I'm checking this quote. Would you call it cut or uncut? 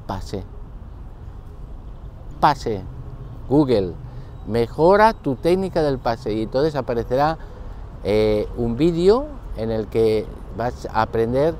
cut